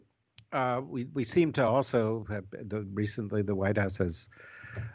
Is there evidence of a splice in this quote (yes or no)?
no